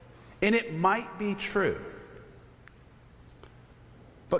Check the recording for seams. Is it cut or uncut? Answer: uncut